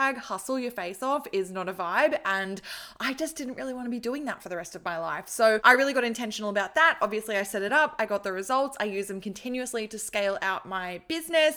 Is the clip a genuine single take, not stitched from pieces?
yes; 0 cuts

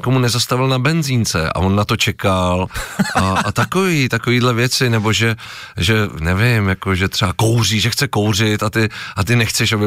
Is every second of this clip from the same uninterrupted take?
yes; 0 cuts

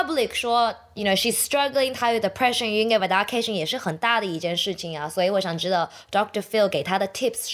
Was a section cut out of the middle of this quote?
no; 0 cuts

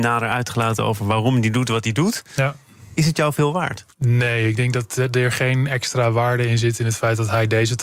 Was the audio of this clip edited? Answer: yes; 1 cut; at 3.9 s

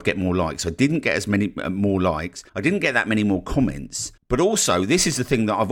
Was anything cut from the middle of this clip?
yes; 2 cuts; at 2.5 s, 4.2 s

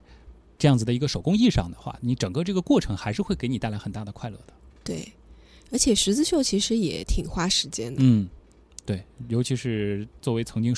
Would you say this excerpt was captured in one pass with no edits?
yes; 0 cuts

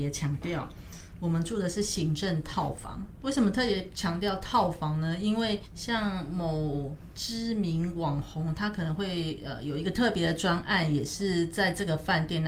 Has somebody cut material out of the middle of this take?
yes; 1 cut; at 5.7 s

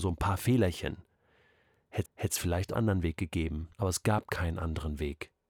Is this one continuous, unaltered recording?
no; 3 cuts; at 2.1 s, 2.7 s, 3.7 s

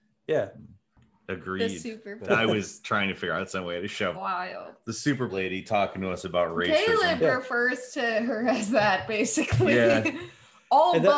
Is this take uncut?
no; 3 cuts; at 2.2 s, 4.1 s, 5.3 s

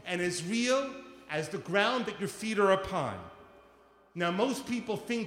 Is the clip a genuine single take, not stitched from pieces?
yes; 0 cuts

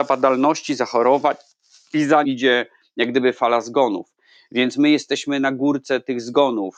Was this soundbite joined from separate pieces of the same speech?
yes; 1 cut; at 2.2 s

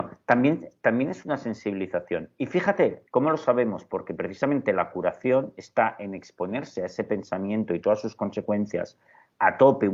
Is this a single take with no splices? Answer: no; 1 cut; at 3.1 s

